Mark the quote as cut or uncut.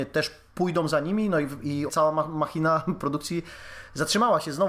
cut